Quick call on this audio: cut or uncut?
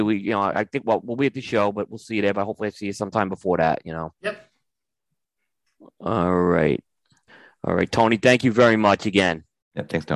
uncut